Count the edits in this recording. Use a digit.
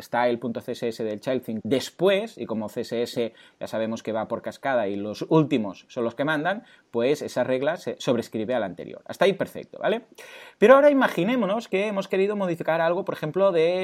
1